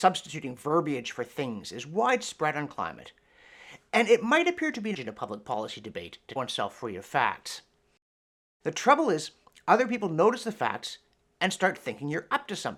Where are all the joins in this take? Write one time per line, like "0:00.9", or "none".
0:04.9
0:06.4